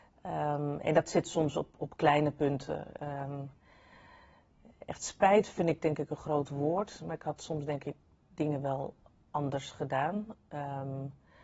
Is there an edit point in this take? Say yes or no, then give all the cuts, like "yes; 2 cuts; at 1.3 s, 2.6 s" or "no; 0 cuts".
no; 0 cuts